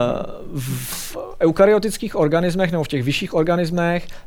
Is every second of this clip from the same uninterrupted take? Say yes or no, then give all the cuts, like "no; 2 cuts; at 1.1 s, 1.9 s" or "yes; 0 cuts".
yes; 0 cuts